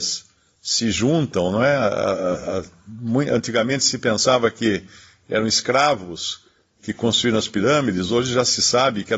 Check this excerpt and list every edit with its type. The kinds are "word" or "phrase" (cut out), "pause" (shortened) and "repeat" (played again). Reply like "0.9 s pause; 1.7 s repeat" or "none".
none